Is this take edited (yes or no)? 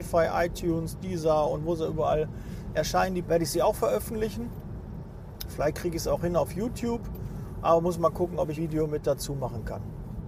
yes